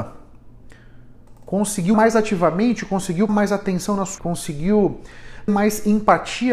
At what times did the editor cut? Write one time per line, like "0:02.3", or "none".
0:01.9
0:03.3
0:04.2
0:05.5